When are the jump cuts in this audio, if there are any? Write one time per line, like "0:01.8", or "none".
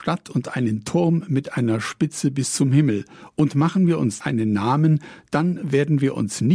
0:04.2